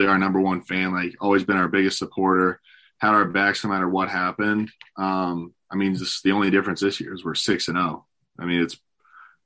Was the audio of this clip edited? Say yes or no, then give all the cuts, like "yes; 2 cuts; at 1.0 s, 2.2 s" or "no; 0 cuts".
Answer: no; 0 cuts